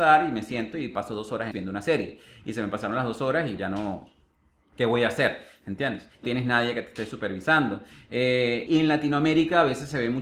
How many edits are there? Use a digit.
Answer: 4